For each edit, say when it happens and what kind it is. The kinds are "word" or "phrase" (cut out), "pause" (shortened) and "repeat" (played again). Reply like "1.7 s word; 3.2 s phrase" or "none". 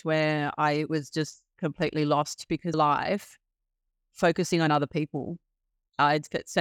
2.7 s phrase